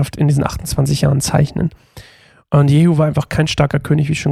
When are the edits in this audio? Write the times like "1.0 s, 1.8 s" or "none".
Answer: none